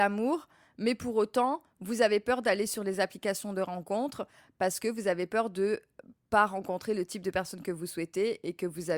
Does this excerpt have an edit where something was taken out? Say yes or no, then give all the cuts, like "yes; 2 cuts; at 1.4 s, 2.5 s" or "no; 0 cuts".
no; 0 cuts